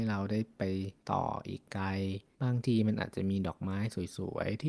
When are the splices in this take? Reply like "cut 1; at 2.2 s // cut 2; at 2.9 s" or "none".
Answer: cut 1; at 1.0 s // cut 2; at 2.3 s